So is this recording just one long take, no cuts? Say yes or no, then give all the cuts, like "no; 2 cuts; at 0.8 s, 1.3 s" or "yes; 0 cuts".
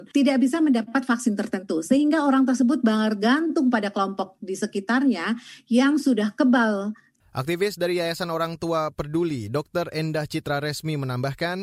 yes; 0 cuts